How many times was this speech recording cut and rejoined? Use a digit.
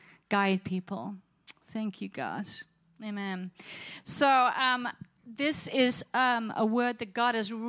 0